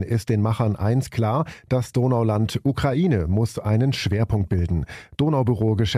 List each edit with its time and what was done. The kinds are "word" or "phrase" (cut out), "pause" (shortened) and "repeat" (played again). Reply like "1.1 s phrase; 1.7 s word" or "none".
none